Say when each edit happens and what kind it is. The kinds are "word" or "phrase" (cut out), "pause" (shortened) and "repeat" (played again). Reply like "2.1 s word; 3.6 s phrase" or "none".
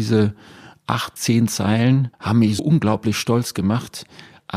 1.2 s word; 2.6 s word